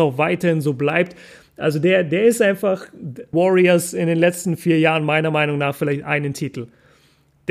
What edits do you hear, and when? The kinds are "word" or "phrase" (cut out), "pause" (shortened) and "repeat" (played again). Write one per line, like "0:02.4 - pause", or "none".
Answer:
0:03.3 - phrase

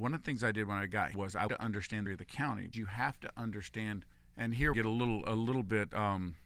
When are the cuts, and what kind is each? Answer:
0:01.1 - word
0:01.5 - word
0:02.1 - phrase
0:02.7 - word
0:04.1 - pause
0:04.7 - phrase

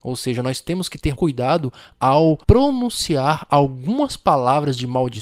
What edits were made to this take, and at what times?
0:01.1 - word
0:02.4 - pause

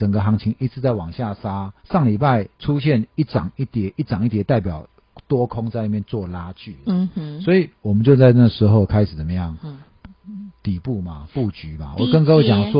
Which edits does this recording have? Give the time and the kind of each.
0:01.8 - pause
0:02.5 - pause

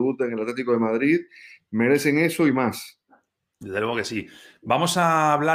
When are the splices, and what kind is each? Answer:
none

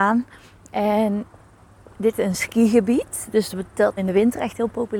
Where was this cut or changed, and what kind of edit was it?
0:02.1 - phrase
0:04.0 - word

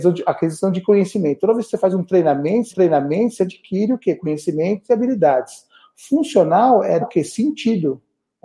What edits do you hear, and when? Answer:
0:02.7 - repeat
0:07.0 - word

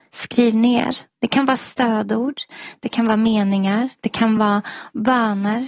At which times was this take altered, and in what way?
none

